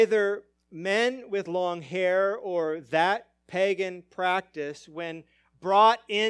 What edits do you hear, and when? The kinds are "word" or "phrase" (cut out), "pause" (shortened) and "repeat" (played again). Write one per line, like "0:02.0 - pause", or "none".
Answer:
none